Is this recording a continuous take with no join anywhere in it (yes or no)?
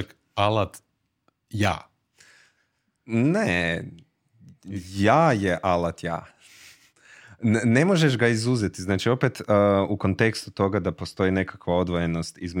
yes